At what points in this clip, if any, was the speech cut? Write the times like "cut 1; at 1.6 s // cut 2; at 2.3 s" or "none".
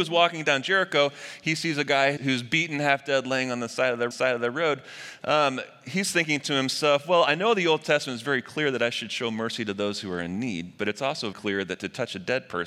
cut 1; at 2.2 s // cut 2; at 4.1 s // cut 3; at 11.3 s